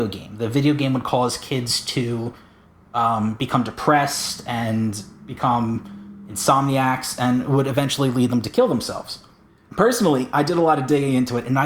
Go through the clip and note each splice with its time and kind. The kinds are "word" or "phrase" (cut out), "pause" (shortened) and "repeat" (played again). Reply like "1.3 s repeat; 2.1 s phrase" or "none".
none